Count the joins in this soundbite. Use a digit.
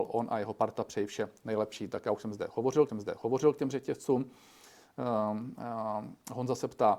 1